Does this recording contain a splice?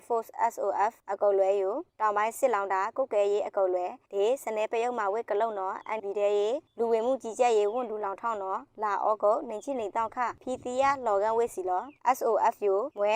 yes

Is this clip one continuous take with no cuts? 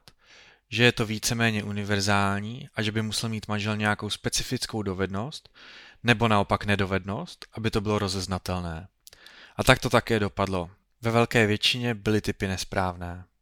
yes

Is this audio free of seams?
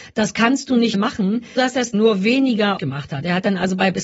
no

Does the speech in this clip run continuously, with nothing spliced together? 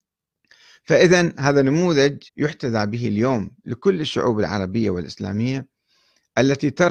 no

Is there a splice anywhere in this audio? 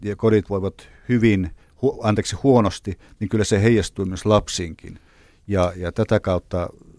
no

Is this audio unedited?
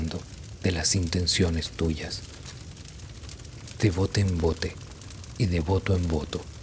yes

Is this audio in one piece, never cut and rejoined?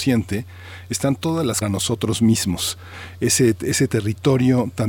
no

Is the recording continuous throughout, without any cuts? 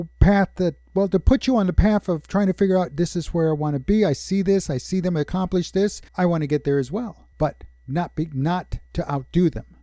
no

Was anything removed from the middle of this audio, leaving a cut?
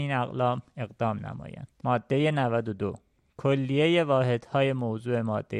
no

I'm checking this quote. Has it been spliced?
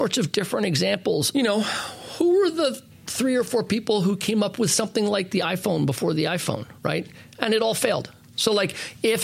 yes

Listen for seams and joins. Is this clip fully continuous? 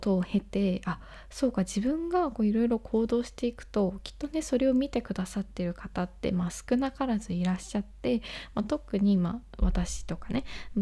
yes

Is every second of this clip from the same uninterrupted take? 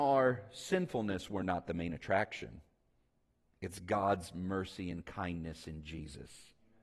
yes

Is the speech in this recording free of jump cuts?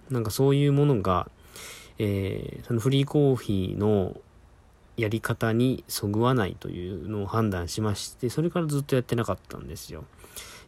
yes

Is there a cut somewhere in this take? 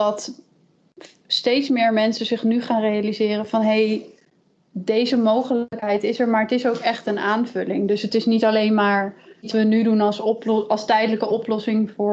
yes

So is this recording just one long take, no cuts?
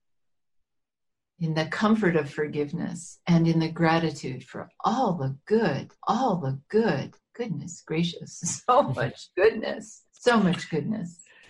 no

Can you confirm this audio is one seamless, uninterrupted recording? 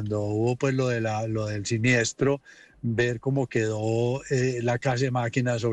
yes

